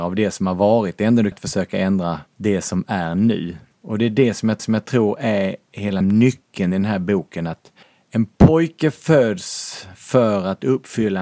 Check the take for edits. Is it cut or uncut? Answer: cut